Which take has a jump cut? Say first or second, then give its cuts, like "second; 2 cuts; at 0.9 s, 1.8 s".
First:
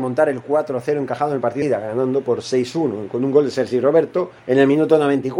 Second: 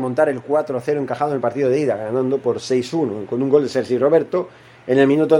first; 2 cuts; at 1.6 s, 4.4 s